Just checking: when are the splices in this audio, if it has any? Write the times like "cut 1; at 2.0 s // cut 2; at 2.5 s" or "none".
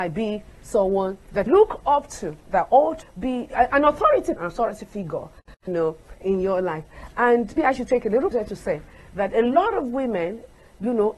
cut 1; at 1.5 s // cut 2; at 3.0 s // cut 3; at 4.4 s // cut 4; at 5.7 s // cut 5; at 6.2 s // cut 6; at 7.6 s // cut 7; at 8.3 s